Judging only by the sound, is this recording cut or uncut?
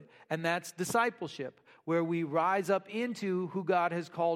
uncut